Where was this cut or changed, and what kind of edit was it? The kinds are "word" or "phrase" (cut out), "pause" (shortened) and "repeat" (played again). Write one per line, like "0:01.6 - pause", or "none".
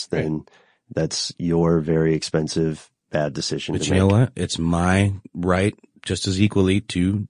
0:05.2 - pause